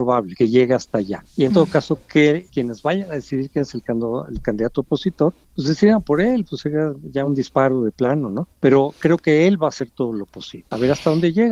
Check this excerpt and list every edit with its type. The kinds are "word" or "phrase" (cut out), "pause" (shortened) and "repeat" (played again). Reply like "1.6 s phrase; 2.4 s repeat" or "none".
none